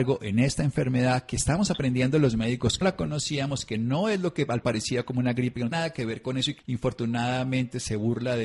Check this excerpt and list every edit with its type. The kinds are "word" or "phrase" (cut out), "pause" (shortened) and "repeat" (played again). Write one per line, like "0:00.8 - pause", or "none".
0:02.8 - word
0:04.6 - word
0:05.7 - word
0:06.6 - phrase